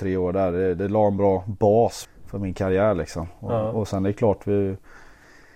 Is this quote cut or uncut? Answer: cut